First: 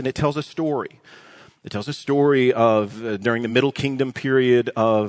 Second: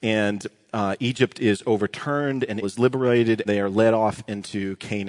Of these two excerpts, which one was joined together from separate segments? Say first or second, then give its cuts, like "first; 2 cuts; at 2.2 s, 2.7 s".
second; 2 cuts; at 2.6 s, 3.5 s